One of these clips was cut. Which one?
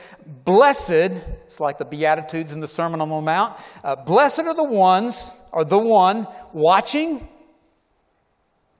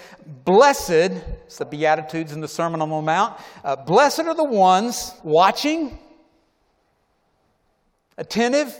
second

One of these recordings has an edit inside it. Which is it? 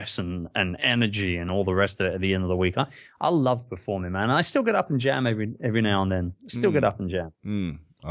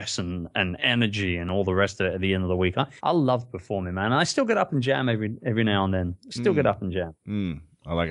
second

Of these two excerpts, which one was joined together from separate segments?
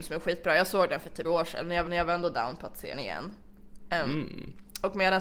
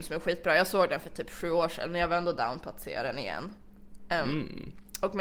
first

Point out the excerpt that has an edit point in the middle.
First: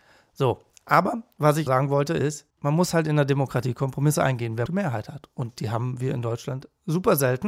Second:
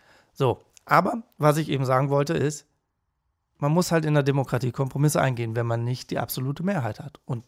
first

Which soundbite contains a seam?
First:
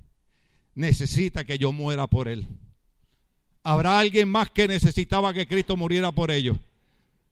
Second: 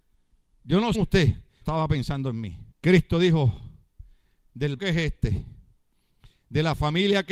second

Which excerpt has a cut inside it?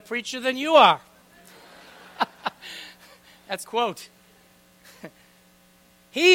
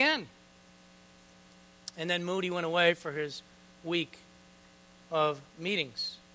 first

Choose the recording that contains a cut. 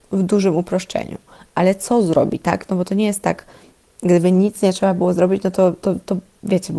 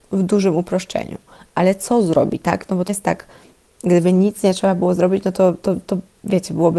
second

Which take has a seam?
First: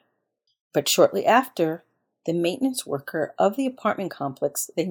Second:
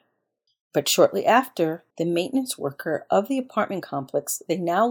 second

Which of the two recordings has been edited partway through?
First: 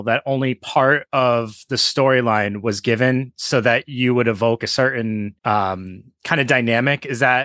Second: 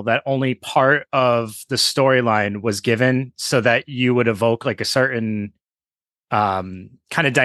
first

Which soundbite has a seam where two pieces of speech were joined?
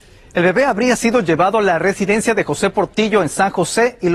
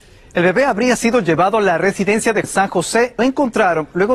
second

